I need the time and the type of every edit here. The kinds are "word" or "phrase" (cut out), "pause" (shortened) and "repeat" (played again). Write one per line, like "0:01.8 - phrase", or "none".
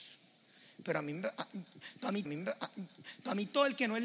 0:02.3 - repeat